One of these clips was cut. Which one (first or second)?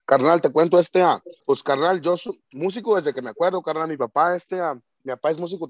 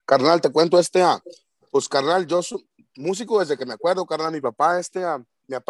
first